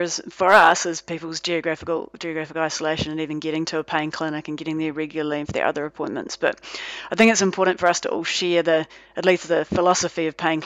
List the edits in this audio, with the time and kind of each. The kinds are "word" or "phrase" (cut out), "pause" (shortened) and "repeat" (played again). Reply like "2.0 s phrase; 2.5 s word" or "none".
none